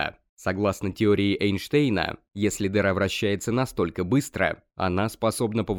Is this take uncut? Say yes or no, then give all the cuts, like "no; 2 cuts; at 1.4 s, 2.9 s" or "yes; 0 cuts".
yes; 0 cuts